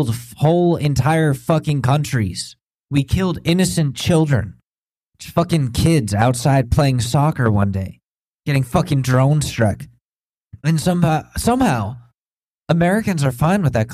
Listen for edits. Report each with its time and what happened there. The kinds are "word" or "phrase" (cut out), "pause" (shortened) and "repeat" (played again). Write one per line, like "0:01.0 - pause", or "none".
none